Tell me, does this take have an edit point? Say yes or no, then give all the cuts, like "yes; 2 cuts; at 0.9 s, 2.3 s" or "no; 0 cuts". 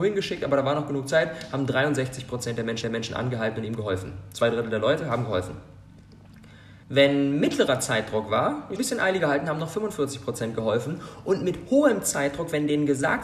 yes; 3 cuts; at 2.8 s, 6.8 s, 8.8 s